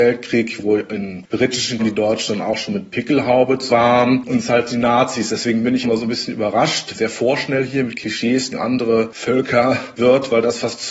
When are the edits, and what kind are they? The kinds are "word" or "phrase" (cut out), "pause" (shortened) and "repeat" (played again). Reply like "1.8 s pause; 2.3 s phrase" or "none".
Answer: 1.8 s word; 3.7 s word; 4.3 s word; 5.8 s word; 6.9 s word; 8.5 s word; 10.0 s word